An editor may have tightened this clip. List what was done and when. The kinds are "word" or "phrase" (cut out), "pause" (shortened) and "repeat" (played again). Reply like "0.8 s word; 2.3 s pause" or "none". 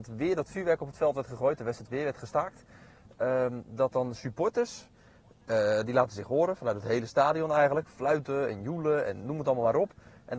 none